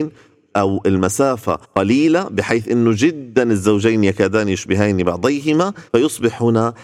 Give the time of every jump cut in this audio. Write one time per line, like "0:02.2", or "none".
0:01.6
0:05.9

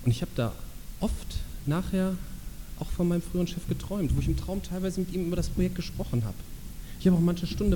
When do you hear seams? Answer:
none

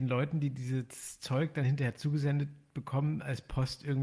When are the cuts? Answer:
none

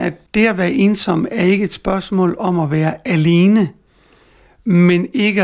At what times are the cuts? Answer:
none

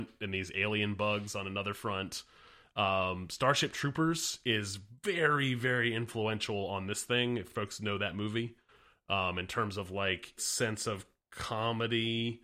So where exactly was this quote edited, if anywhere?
0:10.4

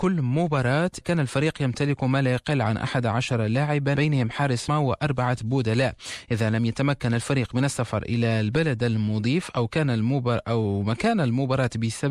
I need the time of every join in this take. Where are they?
0:01.0
0:04.0
0:04.7

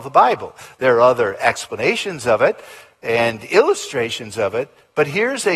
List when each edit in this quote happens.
none

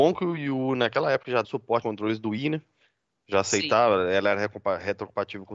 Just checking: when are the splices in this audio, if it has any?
0:01.4
0:01.8

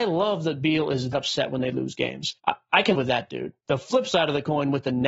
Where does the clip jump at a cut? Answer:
0:01.1
0:02.4
0:02.9
0:03.6

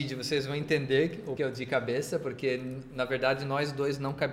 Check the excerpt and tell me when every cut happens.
0:01.4

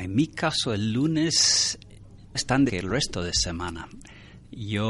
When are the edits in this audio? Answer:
0:02.3
0:02.7

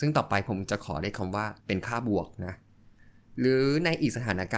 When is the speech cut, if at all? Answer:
0:01.6

